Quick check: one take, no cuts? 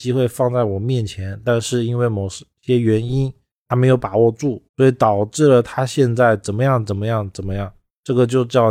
no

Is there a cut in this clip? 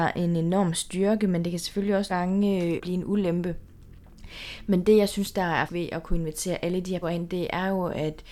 yes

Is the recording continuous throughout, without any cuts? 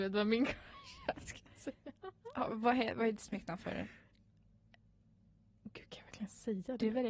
yes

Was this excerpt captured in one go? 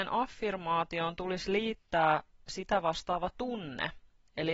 yes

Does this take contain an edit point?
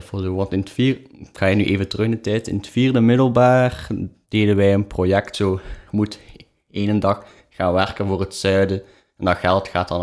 no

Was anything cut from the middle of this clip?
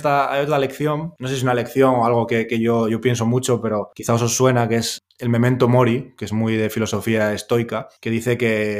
no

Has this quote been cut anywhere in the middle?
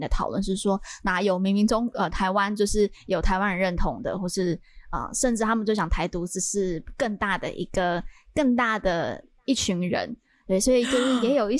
no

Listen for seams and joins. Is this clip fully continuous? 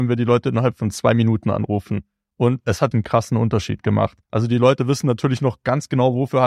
no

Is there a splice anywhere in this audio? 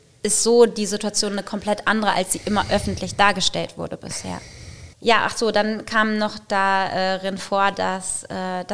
yes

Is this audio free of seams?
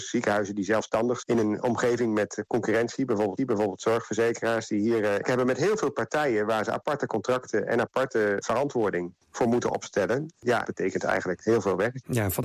no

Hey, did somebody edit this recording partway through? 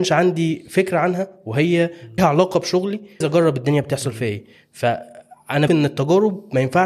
yes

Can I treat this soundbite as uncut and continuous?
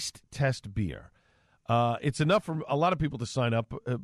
yes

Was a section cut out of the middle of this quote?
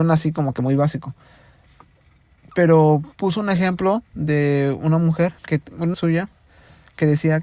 yes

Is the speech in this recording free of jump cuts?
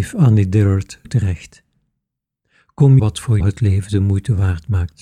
no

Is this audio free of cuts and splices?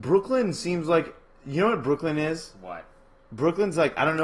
yes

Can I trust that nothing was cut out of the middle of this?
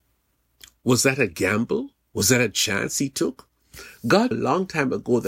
no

